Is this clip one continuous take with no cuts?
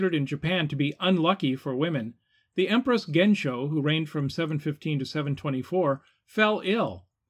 yes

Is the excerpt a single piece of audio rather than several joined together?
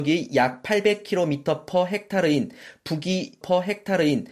no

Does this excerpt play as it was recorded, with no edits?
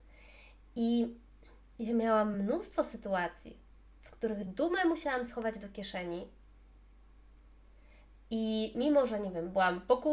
yes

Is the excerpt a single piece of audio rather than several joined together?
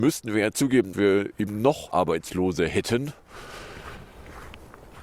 no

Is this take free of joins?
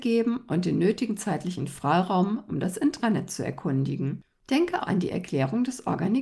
no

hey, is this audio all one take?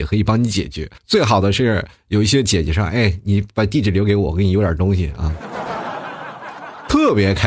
no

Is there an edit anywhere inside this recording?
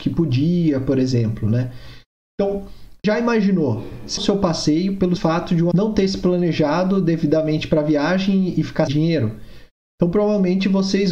yes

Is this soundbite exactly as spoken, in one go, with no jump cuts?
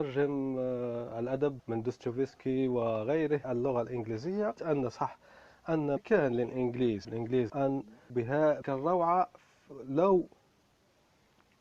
no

